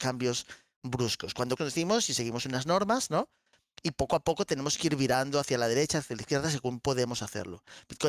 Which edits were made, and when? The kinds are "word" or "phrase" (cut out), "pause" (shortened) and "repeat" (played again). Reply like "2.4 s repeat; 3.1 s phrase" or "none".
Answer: 1.6 s word